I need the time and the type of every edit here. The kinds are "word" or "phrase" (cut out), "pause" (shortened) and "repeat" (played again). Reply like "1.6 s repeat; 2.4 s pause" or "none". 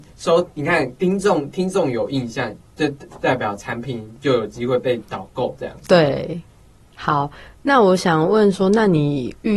none